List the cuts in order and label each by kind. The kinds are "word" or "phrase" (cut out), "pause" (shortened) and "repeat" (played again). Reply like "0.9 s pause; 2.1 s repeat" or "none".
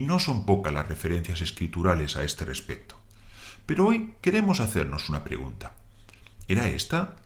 4.2 s pause